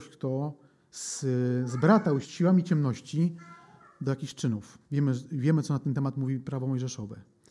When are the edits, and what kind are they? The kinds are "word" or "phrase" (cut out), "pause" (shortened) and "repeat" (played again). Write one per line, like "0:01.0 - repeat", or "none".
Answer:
0:02.2 - word
0:04.8 - pause